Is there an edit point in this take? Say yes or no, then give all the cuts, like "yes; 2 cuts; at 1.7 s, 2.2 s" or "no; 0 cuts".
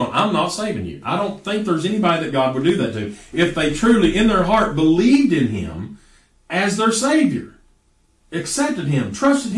no; 0 cuts